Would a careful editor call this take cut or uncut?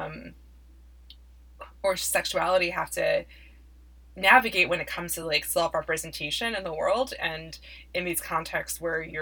uncut